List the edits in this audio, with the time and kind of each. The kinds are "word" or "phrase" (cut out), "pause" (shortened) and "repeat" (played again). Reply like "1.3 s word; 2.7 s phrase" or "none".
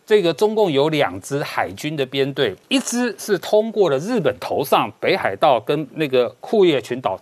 2.6 s pause